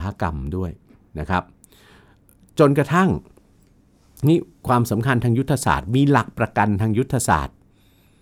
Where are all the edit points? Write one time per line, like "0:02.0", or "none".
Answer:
none